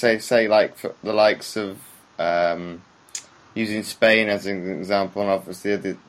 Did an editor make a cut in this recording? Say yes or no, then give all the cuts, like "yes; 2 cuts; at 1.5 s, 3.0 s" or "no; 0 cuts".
no; 0 cuts